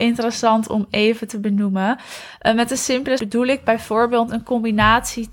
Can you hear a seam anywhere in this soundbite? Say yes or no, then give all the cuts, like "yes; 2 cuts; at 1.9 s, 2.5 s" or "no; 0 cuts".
yes; 1 cut; at 3.2 s